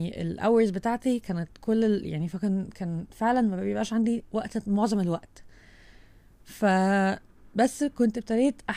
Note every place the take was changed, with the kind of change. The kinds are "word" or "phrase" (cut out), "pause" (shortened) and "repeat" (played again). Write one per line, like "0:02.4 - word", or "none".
none

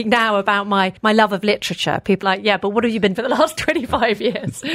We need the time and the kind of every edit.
0:01.0 - pause
0:02.2 - phrase
0:03.1 - word

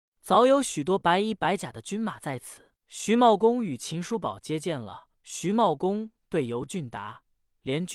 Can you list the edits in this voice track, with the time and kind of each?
0:02.8 - pause
0:05.1 - pause

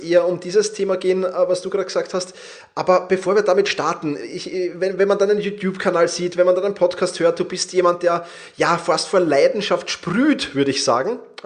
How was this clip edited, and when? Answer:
none

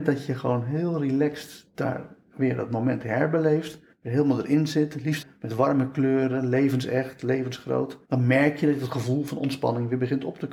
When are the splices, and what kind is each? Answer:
0:03.9 - pause
0:05.2 - word
0:08.0 - pause

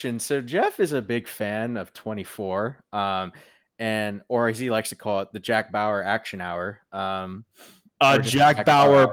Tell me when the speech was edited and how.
none

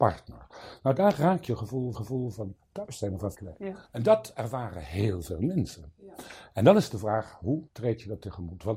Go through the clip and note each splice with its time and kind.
0:01.5 - word
0:01.9 - repeat
0:03.3 - word
0:03.8 - pause
0:07.7 - pause

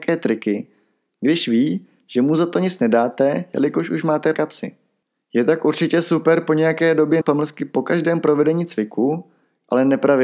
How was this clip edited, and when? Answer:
0:04.3 - word
0:07.2 - word

